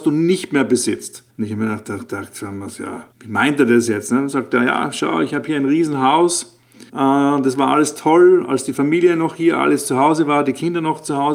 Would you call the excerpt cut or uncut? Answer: cut